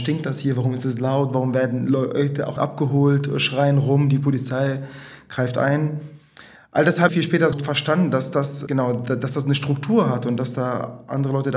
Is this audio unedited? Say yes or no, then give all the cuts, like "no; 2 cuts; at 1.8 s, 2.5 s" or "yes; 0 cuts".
no; 4 cuts; at 2.6 s, 7.1 s, 7.5 s, 8.7 s